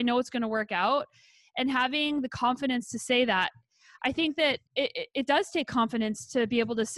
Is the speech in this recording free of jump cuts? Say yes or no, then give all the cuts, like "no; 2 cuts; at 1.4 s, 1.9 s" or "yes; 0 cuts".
no; 1 cut; at 4.7 s